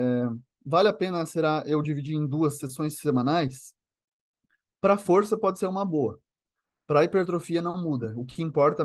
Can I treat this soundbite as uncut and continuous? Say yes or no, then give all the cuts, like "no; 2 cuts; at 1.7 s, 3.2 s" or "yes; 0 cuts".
yes; 0 cuts